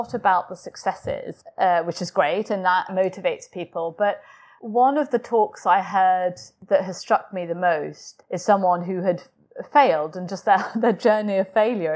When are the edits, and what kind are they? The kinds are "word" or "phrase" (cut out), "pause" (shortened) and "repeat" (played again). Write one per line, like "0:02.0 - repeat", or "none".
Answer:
none